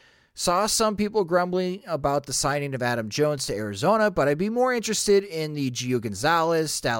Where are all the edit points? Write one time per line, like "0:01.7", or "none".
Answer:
none